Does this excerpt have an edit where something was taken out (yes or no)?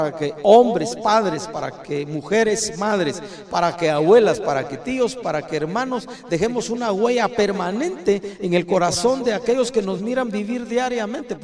no